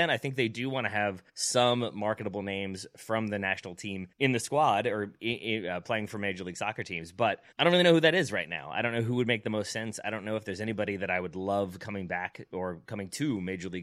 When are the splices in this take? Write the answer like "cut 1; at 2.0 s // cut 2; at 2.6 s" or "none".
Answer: cut 1; at 1.3 s // cut 2; at 4.1 s // cut 3; at 7.5 s